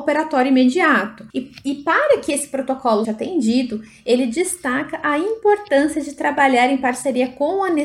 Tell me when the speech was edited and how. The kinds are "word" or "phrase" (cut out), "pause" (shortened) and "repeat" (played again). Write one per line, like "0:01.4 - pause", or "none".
0:01.3 - pause
0:03.0 - phrase